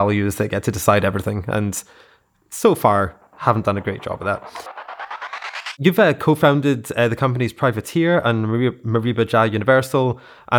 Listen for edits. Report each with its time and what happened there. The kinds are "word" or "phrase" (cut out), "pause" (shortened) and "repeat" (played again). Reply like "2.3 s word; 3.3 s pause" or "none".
none